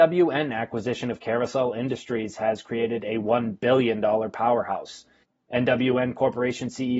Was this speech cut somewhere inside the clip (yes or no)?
no